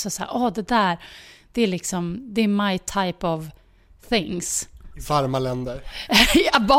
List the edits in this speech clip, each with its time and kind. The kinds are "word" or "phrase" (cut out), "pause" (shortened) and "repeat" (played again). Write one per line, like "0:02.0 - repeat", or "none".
none